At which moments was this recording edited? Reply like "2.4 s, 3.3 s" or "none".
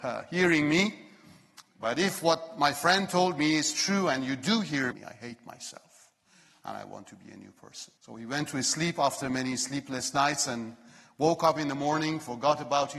4.9 s, 8.0 s